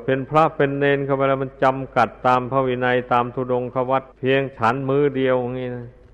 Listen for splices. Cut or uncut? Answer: cut